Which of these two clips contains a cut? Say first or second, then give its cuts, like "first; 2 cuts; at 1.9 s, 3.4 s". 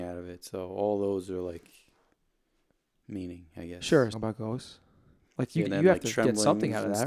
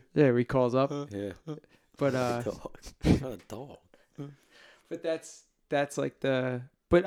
first; 2 cuts; at 4.1 s, 5.7 s